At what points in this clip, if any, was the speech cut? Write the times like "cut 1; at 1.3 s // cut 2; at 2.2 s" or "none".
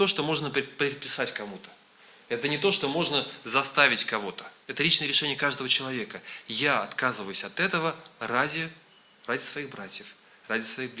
cut 1; at 4.6 s